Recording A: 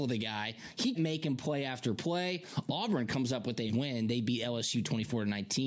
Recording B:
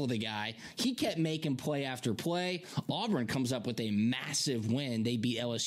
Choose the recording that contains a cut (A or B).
A